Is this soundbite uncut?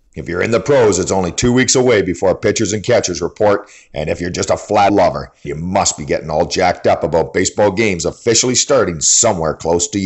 no; 2 cuts; at 4.9 s, 5.4 s

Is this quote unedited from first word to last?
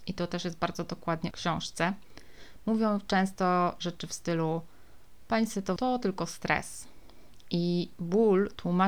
no; 2 cuts; at 1.3 s, 5.8 s

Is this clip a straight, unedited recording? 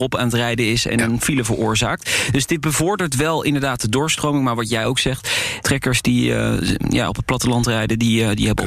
yes; 0 cuts

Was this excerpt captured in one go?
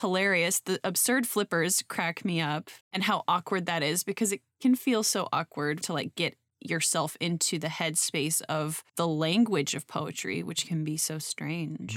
no; 3 cuts; at 2.8 s, 5.8 s, 8.9 s

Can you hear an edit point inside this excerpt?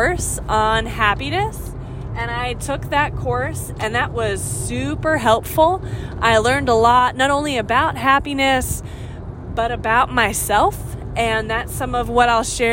no; 0 cuts

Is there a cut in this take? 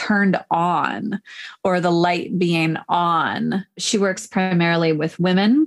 no; 0 cuts

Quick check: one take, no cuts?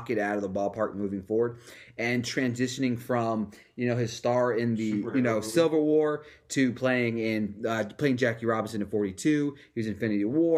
yes; 0 cuts

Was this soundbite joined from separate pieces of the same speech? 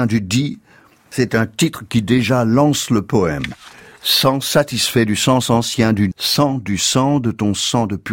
yes; 1 cut; at 6.1 s

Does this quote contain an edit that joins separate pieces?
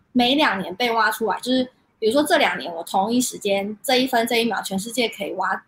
no; 0 cuts

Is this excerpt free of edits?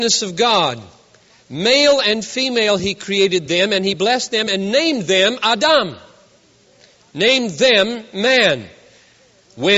yes; 0 cuts

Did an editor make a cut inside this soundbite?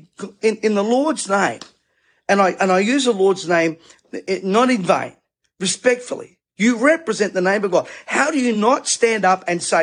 no; 0 cuts

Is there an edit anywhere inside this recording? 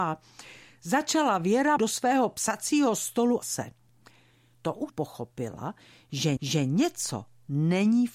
yes; 4 cuts; at 1.8 s, 3.4 s, 4.9 s, 6.4 s

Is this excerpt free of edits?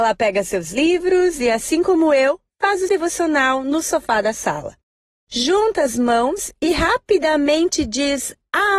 no; 1 cut; at 2.9 s

